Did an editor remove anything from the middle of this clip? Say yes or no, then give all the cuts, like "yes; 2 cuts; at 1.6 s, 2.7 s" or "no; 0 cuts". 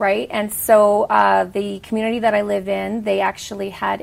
no; 0 cuts